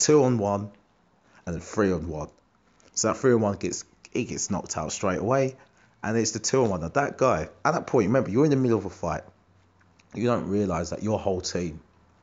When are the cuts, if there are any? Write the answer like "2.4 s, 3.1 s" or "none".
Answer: none

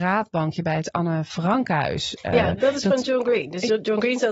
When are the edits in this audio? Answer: none

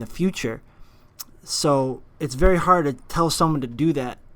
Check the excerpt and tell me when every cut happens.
2.1 s

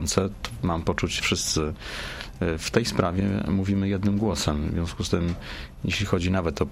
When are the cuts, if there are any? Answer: 1.2 s

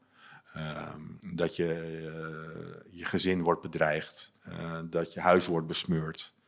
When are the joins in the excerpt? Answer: 1.2 s, 4.4 s

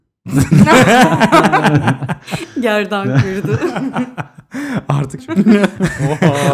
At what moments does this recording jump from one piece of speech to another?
5.2 s

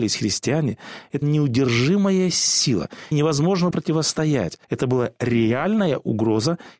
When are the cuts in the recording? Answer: 1.2 s, 3.1 s, 3.7 s, 4.6 s

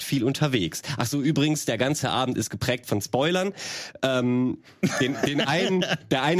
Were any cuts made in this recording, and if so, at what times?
none

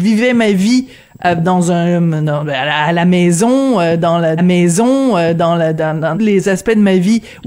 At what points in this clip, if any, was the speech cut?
4.4 s, 6.1 s

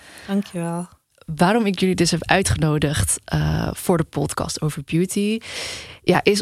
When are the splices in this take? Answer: none

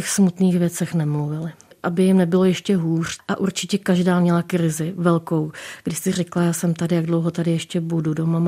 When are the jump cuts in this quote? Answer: none

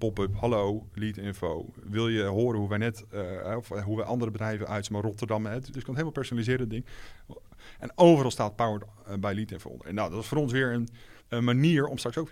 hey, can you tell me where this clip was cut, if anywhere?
5.7 s, 11.2 s

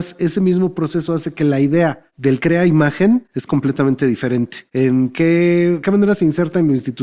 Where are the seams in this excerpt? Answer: 2.4 s, 5.8 s

